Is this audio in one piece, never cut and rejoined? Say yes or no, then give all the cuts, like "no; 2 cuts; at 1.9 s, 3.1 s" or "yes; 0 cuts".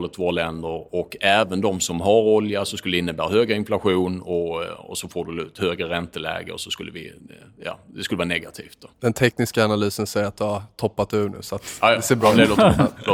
no; 1 cut; at 8.9 s